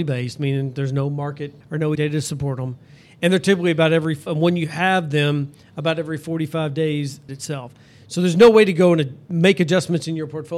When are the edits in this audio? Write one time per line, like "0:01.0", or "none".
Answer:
0:01.6
0:02.0
0:04.3
0:07.3